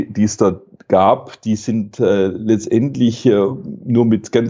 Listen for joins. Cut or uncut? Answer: uncut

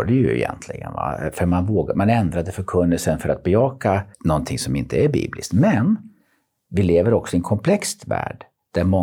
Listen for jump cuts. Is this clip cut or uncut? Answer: cut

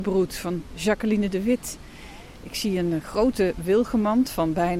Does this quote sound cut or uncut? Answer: uncut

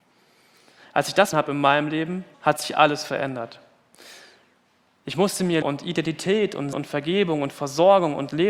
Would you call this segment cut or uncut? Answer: cut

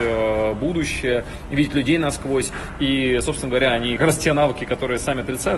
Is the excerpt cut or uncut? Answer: cut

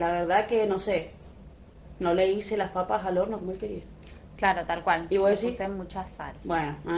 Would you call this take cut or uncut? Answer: uncut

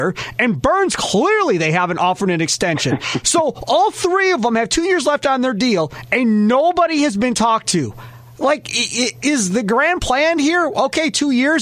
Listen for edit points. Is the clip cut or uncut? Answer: uncut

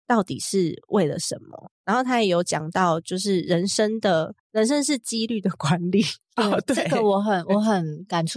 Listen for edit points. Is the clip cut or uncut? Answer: cut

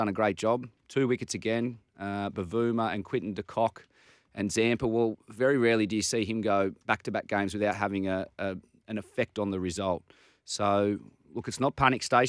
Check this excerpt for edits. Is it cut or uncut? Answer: uncut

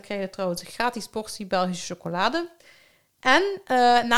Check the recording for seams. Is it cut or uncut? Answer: uncut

